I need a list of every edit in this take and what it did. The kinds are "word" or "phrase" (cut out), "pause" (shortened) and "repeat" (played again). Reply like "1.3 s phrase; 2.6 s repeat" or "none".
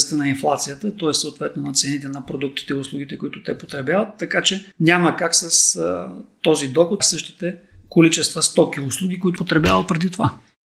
4.7 s pause; 7.0 s phrase; 9.4 s word